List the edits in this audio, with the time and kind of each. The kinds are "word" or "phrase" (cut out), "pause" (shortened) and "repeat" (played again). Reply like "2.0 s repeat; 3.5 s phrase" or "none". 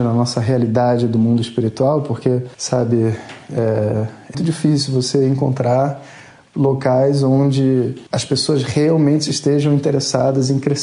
2.5 s pause; 4.3 s word; 8.1 s pause